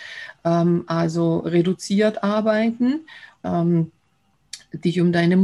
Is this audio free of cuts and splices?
no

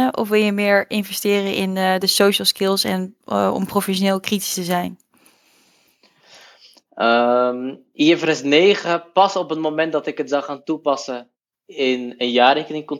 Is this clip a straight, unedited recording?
yes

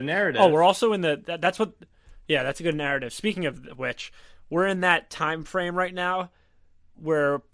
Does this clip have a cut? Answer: no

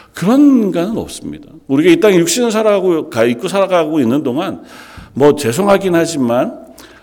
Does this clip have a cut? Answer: yes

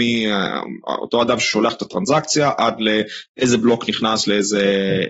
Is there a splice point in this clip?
no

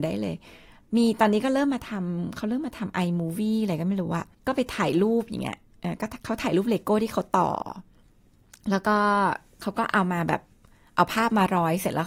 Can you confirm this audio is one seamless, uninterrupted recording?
no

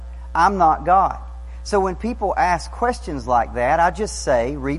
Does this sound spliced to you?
no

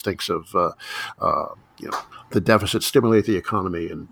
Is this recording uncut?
no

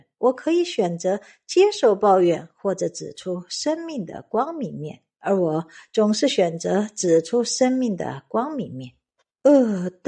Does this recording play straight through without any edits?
yes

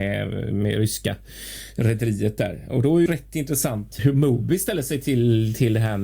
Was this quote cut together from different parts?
yes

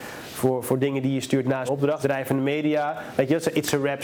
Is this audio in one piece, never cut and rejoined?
no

